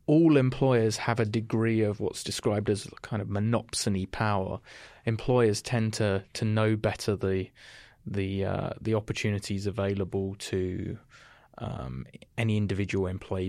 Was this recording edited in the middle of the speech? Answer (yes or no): no